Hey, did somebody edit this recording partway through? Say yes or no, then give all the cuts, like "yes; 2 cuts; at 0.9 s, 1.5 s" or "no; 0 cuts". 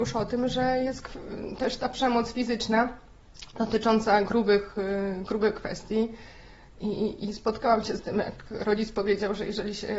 no; 0 cuts